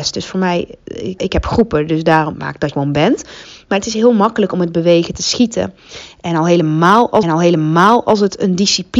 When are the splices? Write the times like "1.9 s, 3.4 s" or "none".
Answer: 1.2 s, 2.3 s, 2.7 s, 5.2 s, 7.2 s